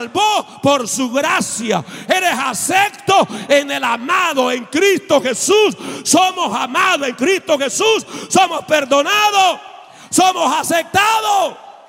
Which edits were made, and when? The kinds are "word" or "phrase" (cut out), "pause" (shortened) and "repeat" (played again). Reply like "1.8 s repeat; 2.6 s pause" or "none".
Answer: none